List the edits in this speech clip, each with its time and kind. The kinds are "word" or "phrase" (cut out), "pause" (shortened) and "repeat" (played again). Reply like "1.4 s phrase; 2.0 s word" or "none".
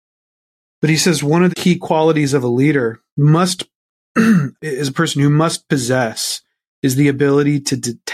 1.5 s word; 4.6 s word